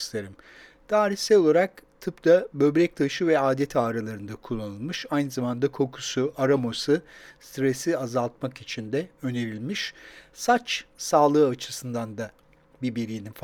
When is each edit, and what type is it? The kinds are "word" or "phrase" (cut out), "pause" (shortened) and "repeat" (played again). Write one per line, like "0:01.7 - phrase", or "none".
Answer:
none